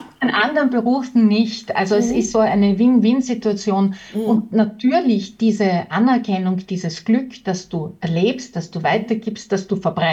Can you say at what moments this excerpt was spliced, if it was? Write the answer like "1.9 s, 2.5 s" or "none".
2.3 s